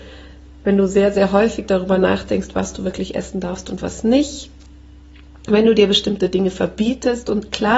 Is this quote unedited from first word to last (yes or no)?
yes